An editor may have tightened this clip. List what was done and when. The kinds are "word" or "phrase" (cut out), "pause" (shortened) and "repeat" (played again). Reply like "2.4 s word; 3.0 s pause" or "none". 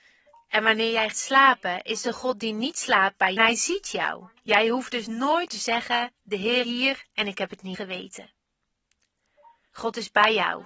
1.1 s word; 3.4 s phrase; 4.4 s pause; 5.5 s word; 6.6 s word; 7.7 s word